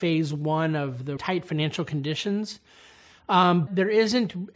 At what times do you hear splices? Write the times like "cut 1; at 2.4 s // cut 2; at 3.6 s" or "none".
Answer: cut 1; at 1.2 s // cut 2; at 3.7 s

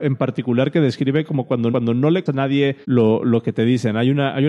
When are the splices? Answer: cut 1; at 1.7 s // cut 2; at 2.3 s // cut 3; at 2.8 s

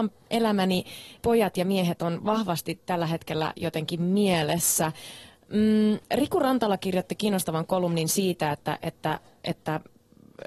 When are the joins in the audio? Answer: cut 1; at 1.2 s // cut 2; at 6.0 s

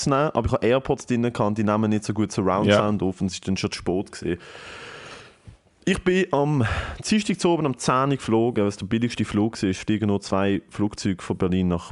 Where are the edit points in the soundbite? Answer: none

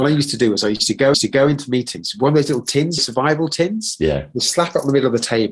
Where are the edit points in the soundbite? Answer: cut 1; at 1.1 s // cut 2; at 3.0 s

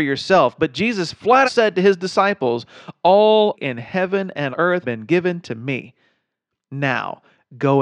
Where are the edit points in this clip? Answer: cut 1; at 1.4 s // cut 2; at 3.5 s // cut 3; at 4.5 s // cut 4; at 4.8 s

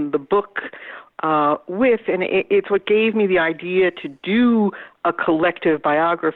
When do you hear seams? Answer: none

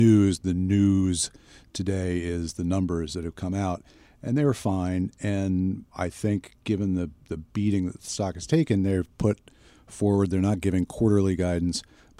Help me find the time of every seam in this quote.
none

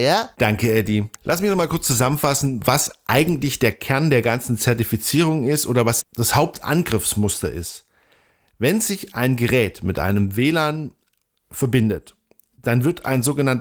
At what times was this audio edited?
cut 1; at 1.2 s // cut 2; at 6.0 s

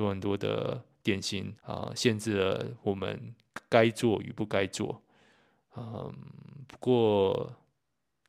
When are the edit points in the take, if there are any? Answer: cut 1; at 1.6 s

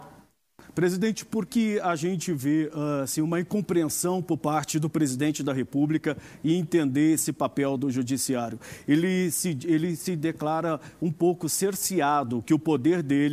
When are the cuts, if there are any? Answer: cut 1; at 1.5 s

